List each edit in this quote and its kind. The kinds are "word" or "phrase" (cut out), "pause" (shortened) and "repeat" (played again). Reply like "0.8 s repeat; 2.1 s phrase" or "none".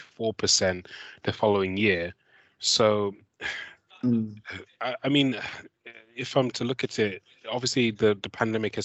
3.9 s pause